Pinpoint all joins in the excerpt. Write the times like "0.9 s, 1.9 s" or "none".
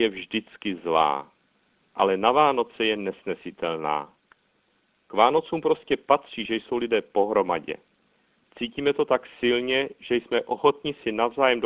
none